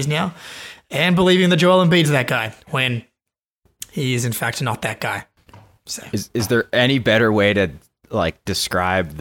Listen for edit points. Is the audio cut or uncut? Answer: cut